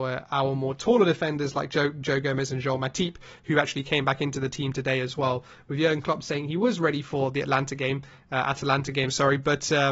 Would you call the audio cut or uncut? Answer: uncut